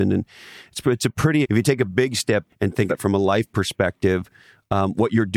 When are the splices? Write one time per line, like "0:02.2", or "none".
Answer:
0:01.4
0:02.5
0:02.9